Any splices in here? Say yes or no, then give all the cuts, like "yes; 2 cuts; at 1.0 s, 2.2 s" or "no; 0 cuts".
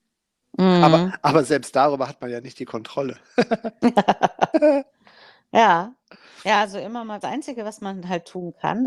yes; 1 cut; at 7.2 s